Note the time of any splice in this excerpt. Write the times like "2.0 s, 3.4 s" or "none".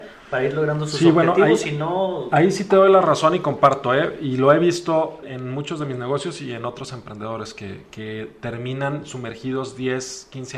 5.2 s, 7.9 s